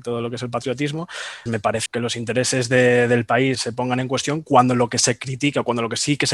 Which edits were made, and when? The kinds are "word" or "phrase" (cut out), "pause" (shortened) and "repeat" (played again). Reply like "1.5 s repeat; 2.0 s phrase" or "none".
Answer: 1.5 s word; 1.9 s word; 3.5 s word